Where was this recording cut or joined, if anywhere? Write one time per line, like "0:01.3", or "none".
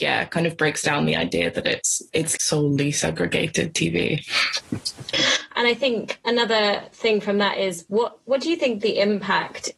0:02.4

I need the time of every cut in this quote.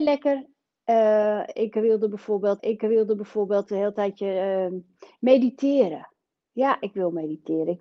0:02.6

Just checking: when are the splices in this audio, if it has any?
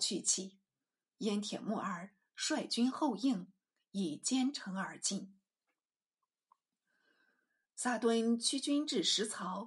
none

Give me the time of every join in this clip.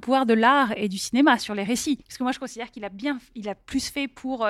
0:02.0

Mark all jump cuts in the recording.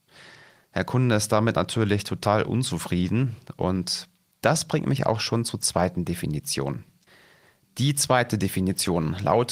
none

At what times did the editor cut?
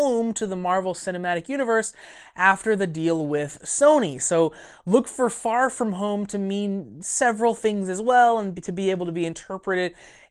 none

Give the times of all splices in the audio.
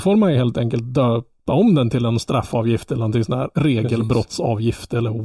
0:03.5

